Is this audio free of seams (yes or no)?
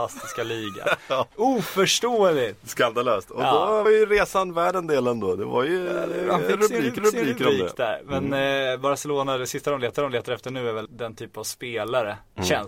no